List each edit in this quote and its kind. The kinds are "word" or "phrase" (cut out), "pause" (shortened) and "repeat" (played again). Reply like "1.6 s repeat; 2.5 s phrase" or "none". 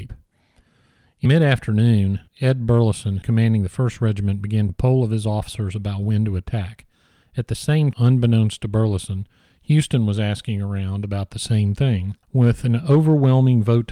1.3 s word; 2.3 s pause; 3.2 s word; 4.7 s word; 7.9 s word; 12.2 s pause